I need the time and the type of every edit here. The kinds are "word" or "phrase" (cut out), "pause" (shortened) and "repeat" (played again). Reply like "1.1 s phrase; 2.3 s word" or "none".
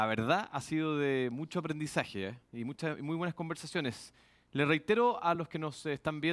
none